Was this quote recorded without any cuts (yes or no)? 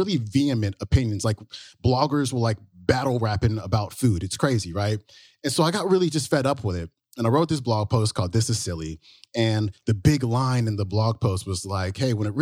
yes